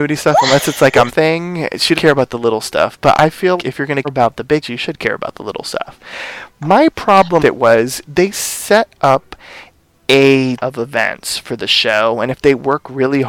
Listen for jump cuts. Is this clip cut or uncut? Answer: cut